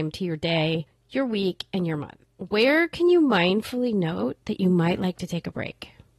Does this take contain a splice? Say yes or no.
no